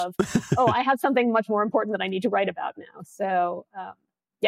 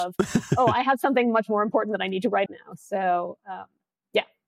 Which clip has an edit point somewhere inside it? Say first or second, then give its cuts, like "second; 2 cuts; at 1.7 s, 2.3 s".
second; 1 cut; at 2.5 s